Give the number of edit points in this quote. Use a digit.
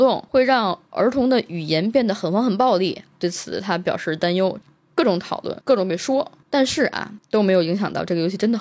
0